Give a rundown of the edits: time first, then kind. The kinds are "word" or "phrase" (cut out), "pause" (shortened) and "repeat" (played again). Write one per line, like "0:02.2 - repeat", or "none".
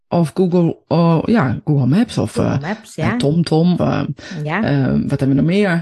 0:03.8 - word